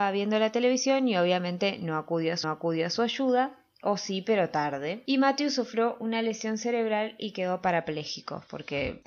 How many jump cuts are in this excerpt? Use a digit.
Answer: 1